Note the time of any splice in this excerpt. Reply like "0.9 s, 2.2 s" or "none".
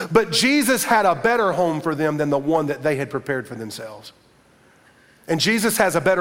none